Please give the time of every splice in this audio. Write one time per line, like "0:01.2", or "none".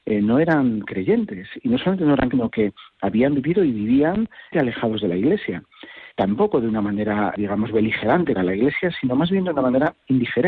0:02.3
0:04.5
0:06.1
0:07.4
0:08.3